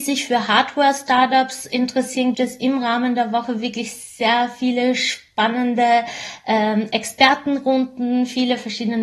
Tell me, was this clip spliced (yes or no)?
yes